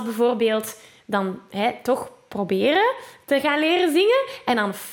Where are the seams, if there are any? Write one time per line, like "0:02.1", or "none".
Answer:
none